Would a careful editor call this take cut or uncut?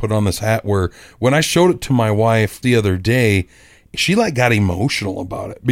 cut